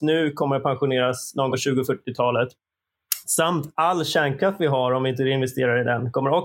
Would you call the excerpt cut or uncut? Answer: cut